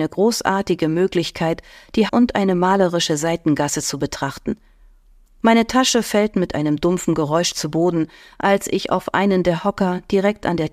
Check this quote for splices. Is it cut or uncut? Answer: cut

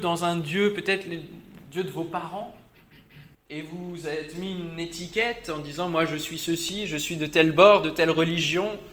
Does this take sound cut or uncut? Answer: cut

